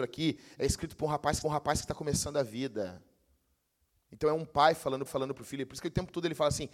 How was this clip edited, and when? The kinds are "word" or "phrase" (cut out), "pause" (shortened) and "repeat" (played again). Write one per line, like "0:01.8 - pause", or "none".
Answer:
0:01.4 - repeat
0:05.1 - repeat

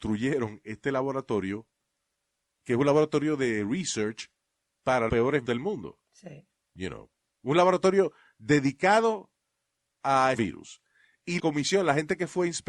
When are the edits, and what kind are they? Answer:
0:05.1 - word
0:05.5 - word
0:10.3 - word
0:11.4 - word

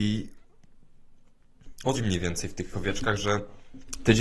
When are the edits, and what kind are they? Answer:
0:01.9 - word
0:02.7 - word

